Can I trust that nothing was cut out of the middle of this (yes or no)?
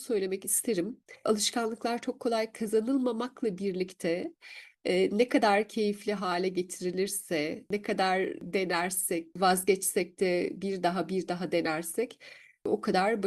yes